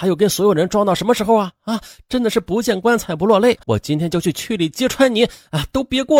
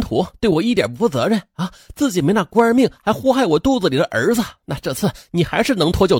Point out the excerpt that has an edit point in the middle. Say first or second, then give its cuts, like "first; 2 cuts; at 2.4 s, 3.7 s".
first; 1 cut; at 3.6 s